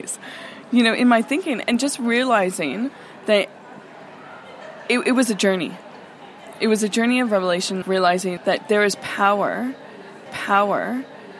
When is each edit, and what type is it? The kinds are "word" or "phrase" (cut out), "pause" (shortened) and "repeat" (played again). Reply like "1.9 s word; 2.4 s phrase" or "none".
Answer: 1.6 s word; 7.8 s word; 8.4 s word; 10.3 s repeat